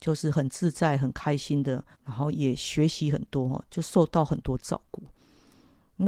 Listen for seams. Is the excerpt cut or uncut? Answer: cut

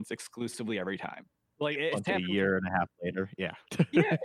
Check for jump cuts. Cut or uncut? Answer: uncut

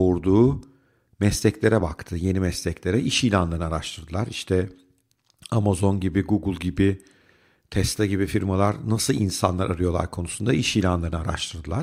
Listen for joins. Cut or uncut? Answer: uncut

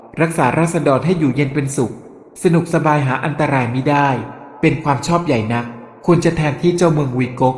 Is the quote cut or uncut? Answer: uncut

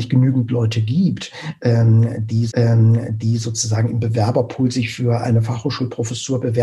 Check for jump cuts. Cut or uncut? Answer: cut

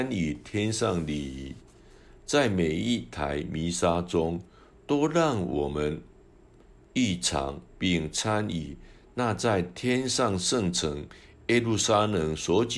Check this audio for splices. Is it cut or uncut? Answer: cut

